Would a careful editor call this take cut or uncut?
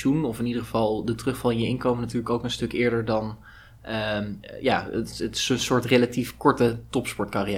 uncut